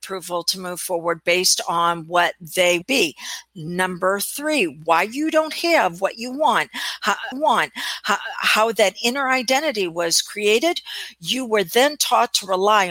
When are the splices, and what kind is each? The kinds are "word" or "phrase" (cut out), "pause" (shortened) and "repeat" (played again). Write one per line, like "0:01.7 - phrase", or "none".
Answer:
0:02.8 - phrase
0:07.3 - repeat